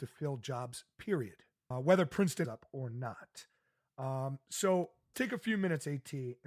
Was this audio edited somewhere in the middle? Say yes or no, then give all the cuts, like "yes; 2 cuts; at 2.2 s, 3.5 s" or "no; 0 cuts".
yes; 3 cuts; at 1.7 s, 2.4 s, 5.1 s